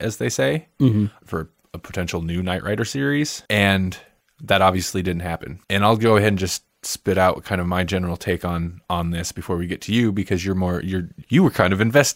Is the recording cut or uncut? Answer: cut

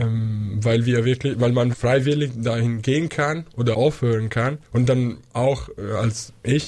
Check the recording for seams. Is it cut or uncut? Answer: cut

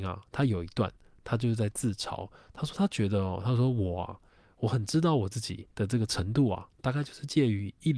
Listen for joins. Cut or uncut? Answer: cut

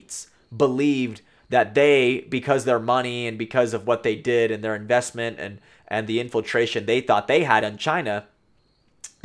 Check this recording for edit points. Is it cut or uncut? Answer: uncut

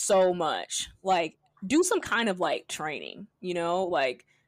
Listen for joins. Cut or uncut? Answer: uncut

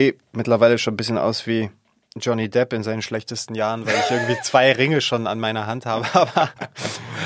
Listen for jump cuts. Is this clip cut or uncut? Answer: uncut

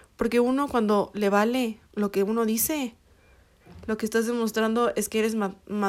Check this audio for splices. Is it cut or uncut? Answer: cut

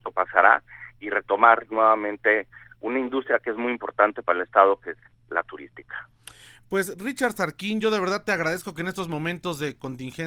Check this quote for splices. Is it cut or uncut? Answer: uncut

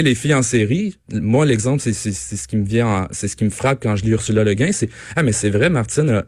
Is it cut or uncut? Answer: uncut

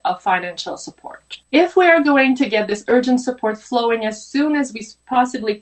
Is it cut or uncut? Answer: cut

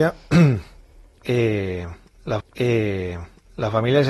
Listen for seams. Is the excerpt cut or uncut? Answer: cut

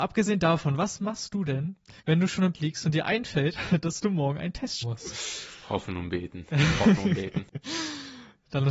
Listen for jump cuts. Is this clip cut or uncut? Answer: cut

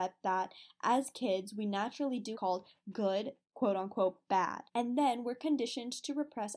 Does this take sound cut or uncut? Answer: cut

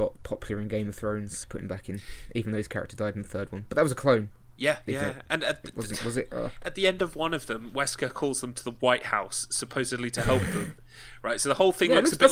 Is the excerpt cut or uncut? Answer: cut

